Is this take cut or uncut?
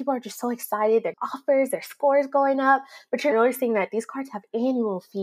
cut